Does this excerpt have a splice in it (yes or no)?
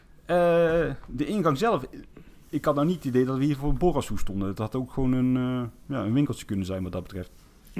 no